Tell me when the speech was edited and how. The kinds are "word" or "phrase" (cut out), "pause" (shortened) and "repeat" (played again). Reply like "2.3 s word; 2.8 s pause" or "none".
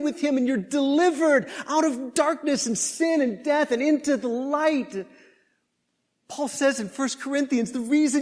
none

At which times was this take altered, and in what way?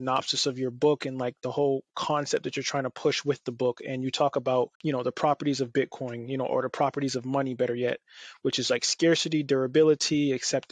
4.8 s pause

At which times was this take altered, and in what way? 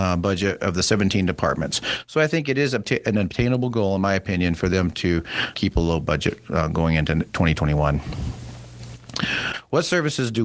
5.5 s word

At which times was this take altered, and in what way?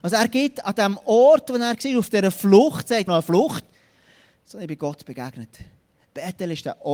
3.1 s phrase

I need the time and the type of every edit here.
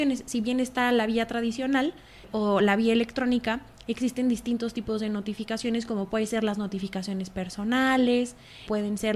none

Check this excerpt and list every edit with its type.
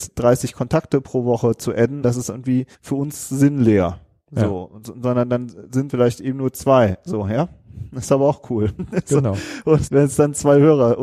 2.0 s word; 2.7 s pause; 5.9 s word; 9.9 s word

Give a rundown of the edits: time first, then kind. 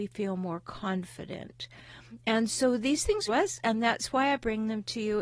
3.3 s phrase

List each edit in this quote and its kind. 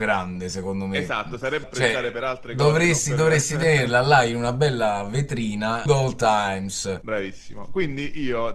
1.6 s word; 5.9 s phrase; 7.0 s word

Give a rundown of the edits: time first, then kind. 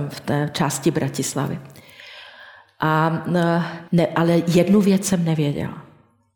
3.9 s pause

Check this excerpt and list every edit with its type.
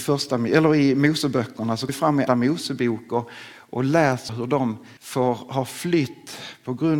1.9 s word; 2.3 s word; 4.3 s phrase; 5.0 s pause

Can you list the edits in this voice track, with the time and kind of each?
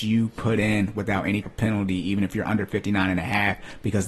1.4 s word

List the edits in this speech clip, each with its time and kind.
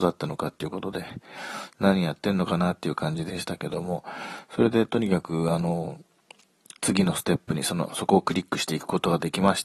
6.8 s pause

